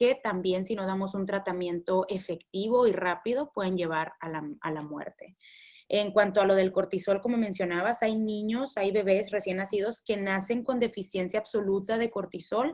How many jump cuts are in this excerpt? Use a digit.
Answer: 0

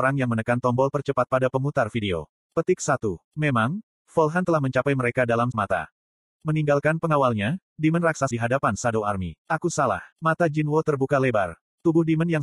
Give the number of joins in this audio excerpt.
5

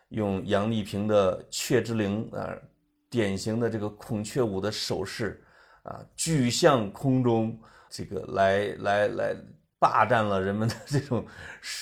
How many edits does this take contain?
1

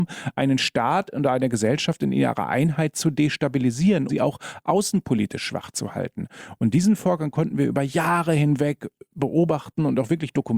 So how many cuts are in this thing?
1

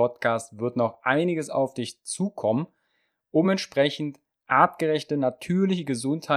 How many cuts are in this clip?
0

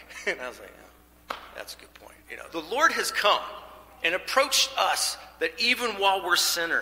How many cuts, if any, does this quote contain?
1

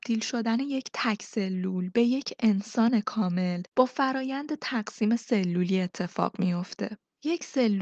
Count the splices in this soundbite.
0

